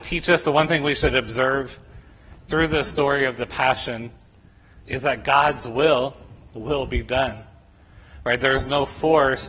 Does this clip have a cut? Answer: no; 0 cuts

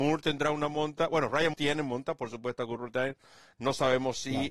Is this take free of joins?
no; 1 cut; at 1.5 s

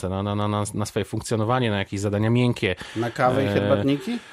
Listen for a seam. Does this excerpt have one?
no; 0 cuts

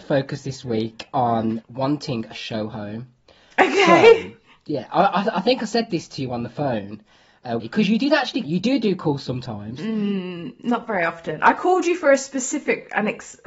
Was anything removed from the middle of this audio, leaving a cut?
yes; 3 cuts; at 1.6 s, 7.6 s, 8.4 s

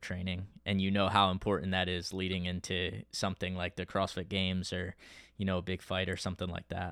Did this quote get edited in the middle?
no; 0 cuts

